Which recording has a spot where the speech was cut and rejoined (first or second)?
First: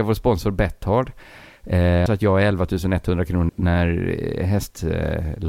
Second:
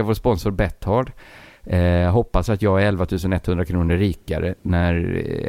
first